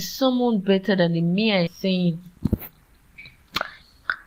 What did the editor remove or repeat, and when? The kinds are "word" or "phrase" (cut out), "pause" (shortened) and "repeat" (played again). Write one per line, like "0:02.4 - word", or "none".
0:01.7 - word